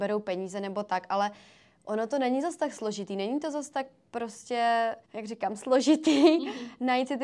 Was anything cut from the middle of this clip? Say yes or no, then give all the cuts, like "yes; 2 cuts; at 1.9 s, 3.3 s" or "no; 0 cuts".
yes; 1 cut; at 5.0 s